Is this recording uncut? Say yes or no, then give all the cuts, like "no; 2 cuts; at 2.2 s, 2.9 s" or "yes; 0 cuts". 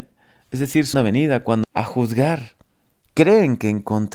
no; 2 cuts; at 0.9 s, 1.6 s